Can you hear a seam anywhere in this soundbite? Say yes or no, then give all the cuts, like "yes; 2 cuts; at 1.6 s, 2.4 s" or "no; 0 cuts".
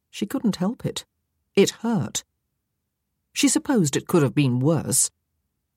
no; 0 cuts